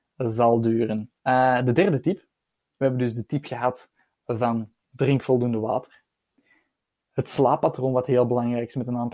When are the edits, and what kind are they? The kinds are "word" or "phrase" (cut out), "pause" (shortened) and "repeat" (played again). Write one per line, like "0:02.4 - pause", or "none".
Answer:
0:01.2 - pause